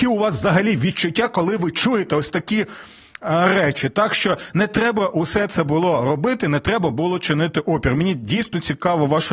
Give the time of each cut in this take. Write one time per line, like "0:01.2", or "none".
none